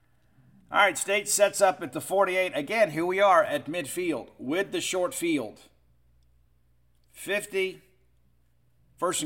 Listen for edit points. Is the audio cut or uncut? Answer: uncut